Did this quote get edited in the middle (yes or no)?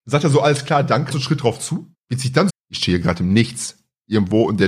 yes